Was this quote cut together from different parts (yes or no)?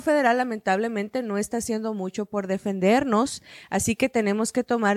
no